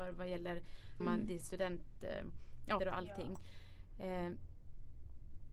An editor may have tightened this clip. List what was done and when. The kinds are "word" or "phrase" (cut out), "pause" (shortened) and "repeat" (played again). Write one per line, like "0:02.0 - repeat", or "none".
0:01.0 - phrase
0:02.8 - word

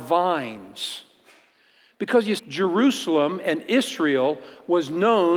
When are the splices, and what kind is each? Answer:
0:02.4 - word

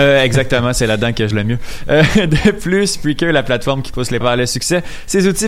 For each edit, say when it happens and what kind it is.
0:01.3 - word
0:04.2 - word

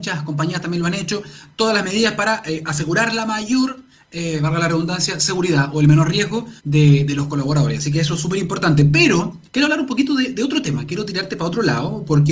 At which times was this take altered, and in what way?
0:06.6 - pause
0:09.5 - pause

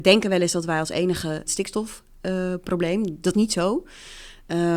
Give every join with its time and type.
0:01.5 - phrase
0:03.3 - word

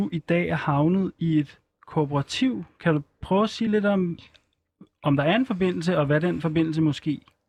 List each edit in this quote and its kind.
none

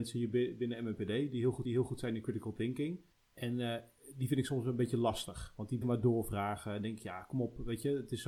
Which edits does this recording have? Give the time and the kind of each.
0:01.6 - repeat
0:03.1 - pause
0:05.8 - word

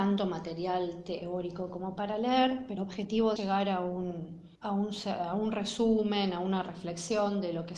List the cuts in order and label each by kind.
0:02.8 - word
0:03.4 - phrase
0:04.5 - pause

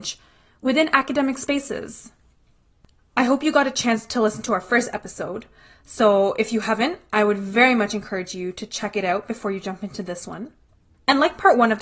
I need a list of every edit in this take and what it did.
none

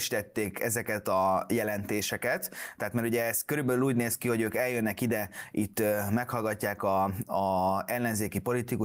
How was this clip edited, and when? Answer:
none

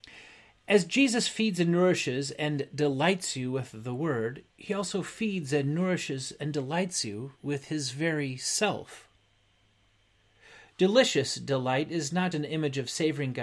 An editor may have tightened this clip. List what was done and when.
0:04.5 - pause
0:07.4 - pause
0:12.3 - word

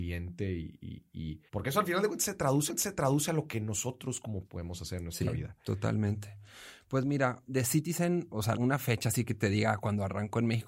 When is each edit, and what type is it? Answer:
0:01.5 - pause
0:02.7 - repeat
0:04.4 - word
0:07.5 - word
0:08.5 - word

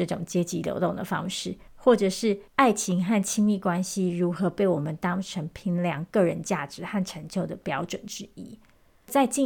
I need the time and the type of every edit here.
0:01.7 - pause
0:02.5 - pause

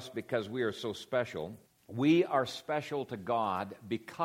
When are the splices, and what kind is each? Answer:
0:01.6 - pause

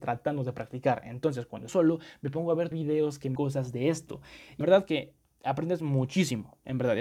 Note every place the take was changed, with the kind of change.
0:01.7 - phrase
0:02.7 - phrase
0:03.4 - word
0:04.6 - word

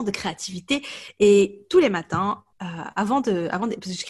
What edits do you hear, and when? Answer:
0:02.5 - pause

